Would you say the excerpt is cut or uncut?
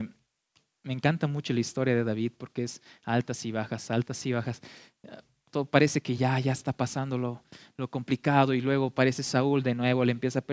uncut